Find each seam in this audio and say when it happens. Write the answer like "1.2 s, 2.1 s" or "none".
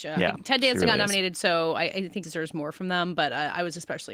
2.2 s